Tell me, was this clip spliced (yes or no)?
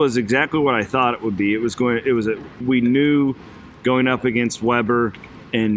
yes